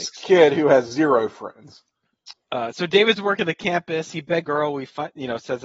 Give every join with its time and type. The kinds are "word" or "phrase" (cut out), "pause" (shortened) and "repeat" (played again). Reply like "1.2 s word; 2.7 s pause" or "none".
4.4 s word

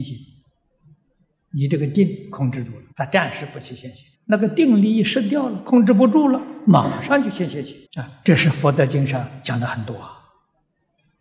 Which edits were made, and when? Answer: 2.9 s pause; 4.1 s pause; 7.9 s pause

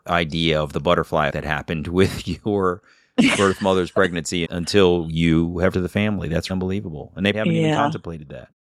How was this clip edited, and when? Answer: 1.3 s word; 4.4 s phrase; 5.7 s word; 6.5 s word; 7.3 s word

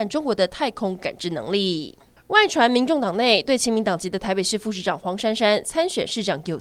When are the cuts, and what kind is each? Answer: none

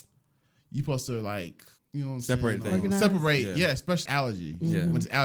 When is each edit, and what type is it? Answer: 1.8 s pause; 4.1 s phrase

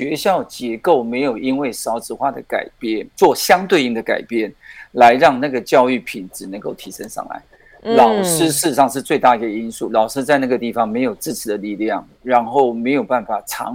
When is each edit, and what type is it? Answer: 3.1 s pause

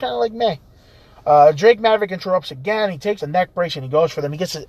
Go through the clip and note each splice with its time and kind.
3.2 s word

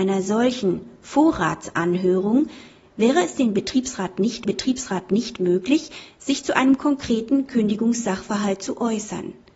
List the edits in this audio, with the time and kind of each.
4.4 s repeat

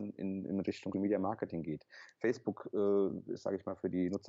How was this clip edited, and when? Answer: 0.9 s word

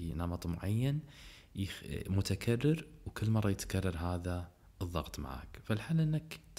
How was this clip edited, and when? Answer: none

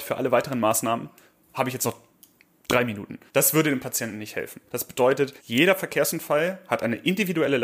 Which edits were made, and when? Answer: 3.3 s pause; 4.7 s pause; 5.4 s pause

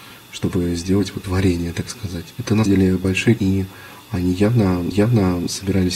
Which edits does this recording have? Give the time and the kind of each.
1.2 s word; 2.3 s pause; 2.7 s word; 3.4 s word; 4.9 s repeat

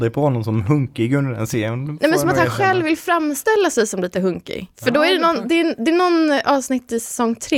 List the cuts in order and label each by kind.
4.7 s pause

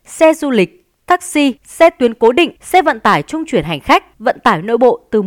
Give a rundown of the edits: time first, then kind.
1.6 s pause; 2.6 s pause; 4.1 s pause

